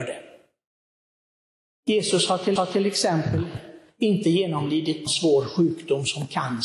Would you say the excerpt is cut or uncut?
cut